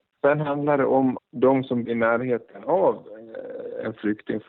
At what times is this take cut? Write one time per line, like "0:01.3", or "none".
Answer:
0:01.2
0:01.9